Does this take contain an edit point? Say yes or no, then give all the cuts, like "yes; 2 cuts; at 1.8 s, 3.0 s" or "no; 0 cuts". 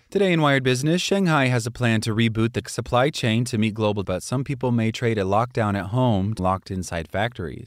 yes; 3 cuts; at 2.6 s, 4.0 s, 6.4 s